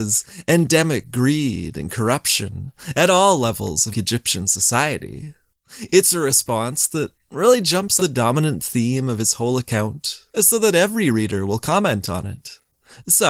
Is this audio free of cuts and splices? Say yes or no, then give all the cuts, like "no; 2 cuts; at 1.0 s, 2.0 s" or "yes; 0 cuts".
no; 3 cuts; at 3.9 s, 8.0 s, 10.3 s